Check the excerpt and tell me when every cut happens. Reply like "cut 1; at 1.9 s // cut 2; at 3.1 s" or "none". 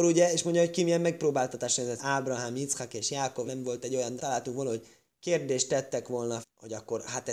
cut 1; at 2.0 s // cut 2; at 3.5 s // cut 3; at 4.2 s // cut 4; at 6.4 s